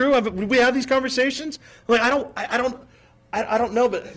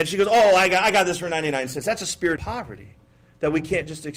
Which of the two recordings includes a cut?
second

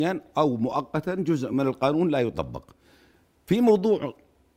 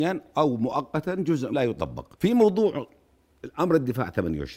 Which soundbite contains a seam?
second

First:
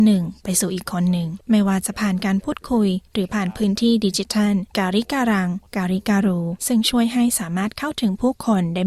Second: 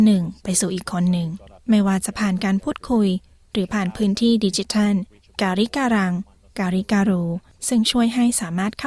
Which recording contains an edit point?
first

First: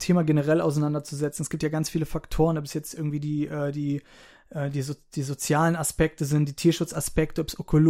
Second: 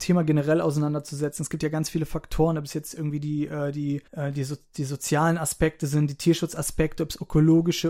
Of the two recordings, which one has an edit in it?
second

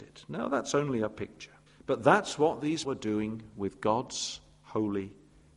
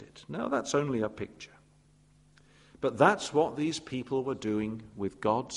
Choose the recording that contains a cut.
first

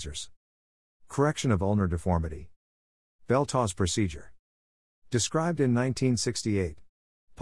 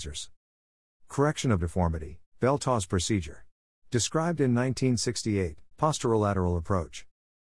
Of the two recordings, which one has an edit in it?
second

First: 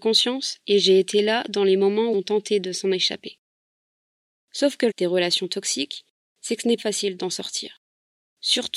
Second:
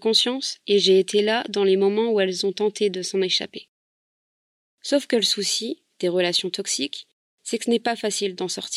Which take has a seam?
first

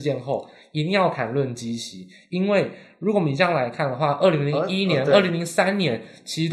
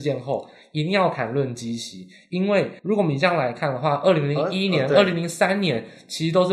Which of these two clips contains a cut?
second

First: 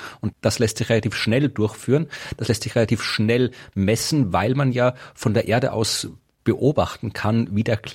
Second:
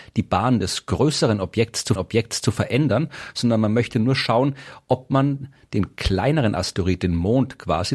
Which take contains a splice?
second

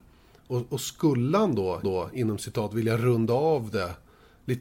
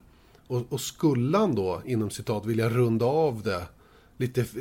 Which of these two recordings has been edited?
first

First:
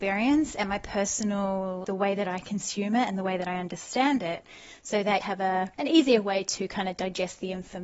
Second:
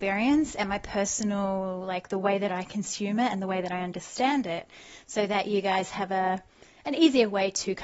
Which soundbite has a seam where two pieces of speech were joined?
first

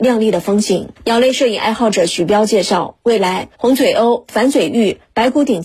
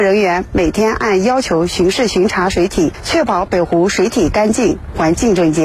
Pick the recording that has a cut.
first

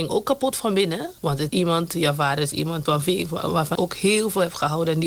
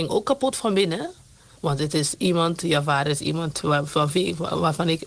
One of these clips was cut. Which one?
first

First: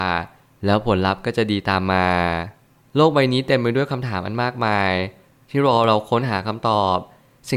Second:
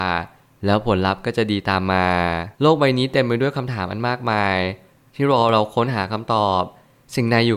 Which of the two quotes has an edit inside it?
second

